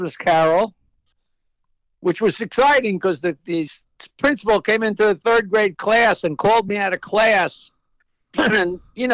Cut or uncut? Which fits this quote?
uncut